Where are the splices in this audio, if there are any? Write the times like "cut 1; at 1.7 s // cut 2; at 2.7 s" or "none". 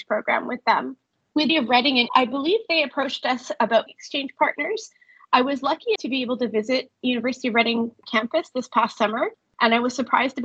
cut 1; at 1.5 s // cut 2; at 2.1 s // cut 3; at 3.9 s // cut 4; at 6.0 s